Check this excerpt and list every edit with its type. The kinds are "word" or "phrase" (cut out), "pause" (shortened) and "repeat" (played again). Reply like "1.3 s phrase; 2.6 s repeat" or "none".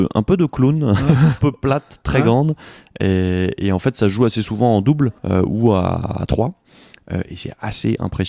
1.4 s word; 5.2 s pause